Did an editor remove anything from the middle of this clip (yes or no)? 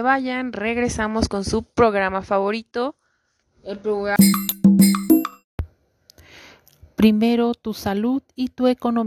yes